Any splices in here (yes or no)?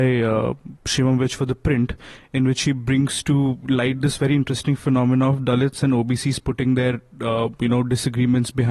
no